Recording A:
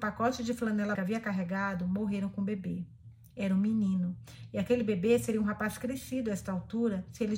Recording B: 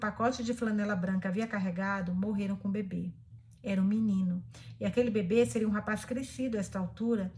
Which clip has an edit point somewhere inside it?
A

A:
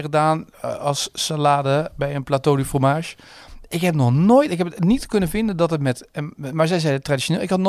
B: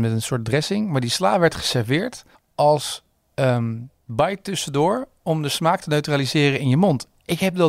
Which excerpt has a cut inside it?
B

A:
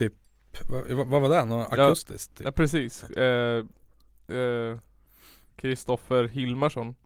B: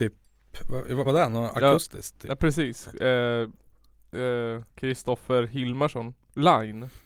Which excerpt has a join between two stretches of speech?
B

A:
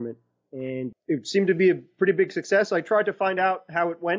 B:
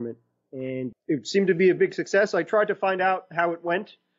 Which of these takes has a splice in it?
B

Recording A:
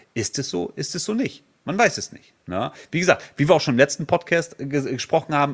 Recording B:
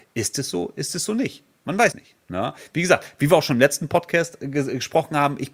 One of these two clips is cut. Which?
B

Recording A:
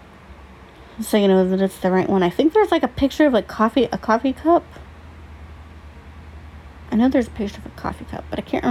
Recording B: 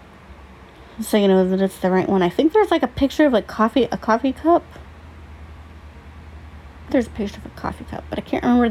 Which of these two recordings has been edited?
B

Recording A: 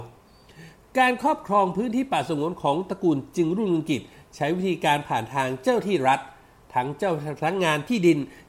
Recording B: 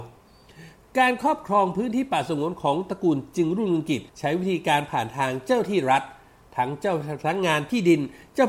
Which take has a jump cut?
B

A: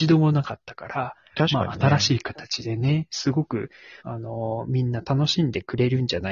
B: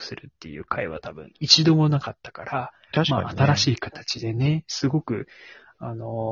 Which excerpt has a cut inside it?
A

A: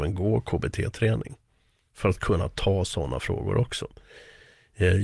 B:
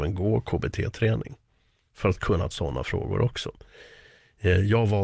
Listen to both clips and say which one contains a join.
B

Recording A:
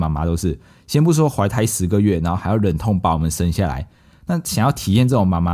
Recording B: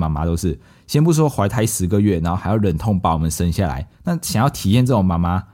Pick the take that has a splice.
B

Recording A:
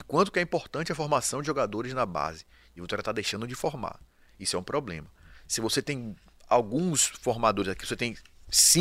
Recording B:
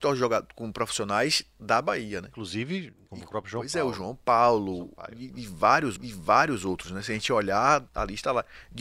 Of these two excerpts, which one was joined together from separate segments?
B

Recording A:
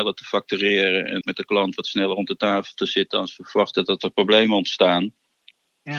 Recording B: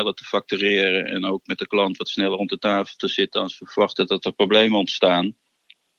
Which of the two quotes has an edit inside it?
A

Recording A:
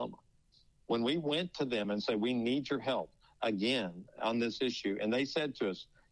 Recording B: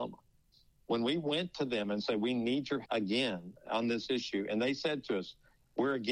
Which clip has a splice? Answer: B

